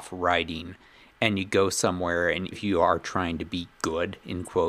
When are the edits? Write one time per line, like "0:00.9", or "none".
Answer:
0:02.5